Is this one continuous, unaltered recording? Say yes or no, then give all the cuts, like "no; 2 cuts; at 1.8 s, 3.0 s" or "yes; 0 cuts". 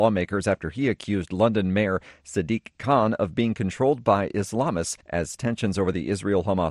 no; 1 cut; at 5.0 s